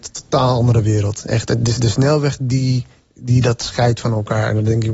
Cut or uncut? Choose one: uncut